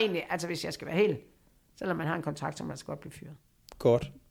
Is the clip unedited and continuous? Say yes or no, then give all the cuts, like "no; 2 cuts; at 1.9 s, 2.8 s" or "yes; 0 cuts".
yes; 0 cuts